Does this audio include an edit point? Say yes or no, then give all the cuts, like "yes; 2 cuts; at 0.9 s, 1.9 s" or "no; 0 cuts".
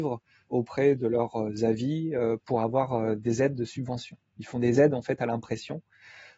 no; 0 cuts